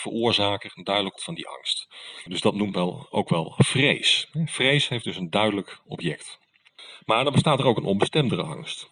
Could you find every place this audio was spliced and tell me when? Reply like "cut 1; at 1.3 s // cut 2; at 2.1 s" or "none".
cut 1; at 1.2 s